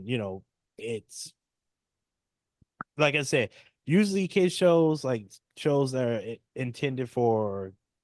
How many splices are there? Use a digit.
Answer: 0